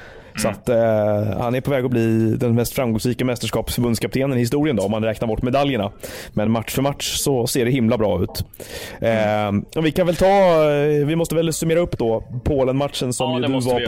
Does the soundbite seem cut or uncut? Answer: uncut